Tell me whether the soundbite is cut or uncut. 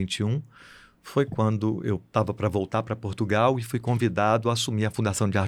uncut